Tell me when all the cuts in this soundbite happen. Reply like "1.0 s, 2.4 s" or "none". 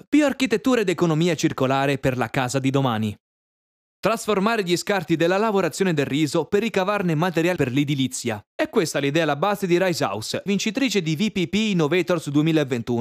7.6 s, 10.5 s